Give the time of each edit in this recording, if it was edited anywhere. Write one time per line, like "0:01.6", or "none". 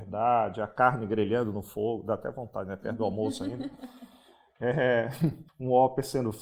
0:05.5